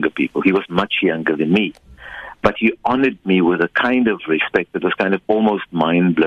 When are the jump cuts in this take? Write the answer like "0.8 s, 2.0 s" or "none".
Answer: none